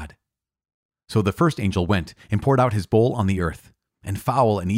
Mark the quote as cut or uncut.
uncut